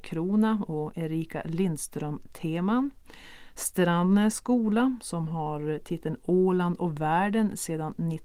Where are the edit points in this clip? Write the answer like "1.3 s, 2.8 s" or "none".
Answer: none